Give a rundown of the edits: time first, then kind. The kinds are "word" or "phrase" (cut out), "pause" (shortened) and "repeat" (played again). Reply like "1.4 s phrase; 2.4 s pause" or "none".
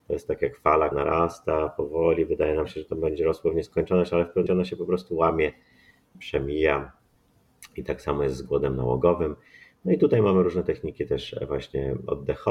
0.9 s word; 4.5 s word; 6.1 s word